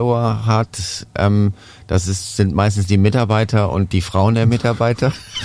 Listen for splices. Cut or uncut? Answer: uncut